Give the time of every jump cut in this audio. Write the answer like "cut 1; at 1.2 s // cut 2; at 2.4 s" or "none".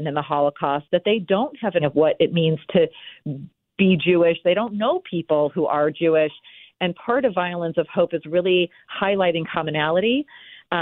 cut 1; at 1.8 s